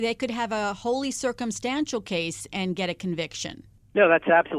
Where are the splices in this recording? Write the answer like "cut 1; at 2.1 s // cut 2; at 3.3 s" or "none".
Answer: none